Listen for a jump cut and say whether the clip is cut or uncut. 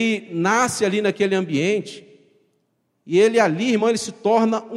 uncut